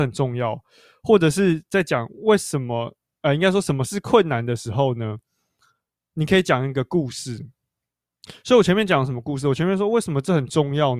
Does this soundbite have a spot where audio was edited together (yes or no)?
no